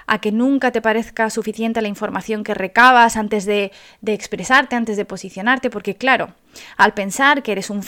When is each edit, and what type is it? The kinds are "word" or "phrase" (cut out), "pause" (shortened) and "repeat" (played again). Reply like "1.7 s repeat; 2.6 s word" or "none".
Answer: none